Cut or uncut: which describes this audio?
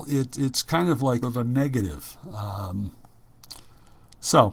cut